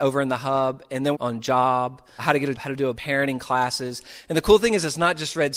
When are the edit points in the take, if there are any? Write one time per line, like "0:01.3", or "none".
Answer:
0:01.1
0:02.2
0:02.6
0:03.0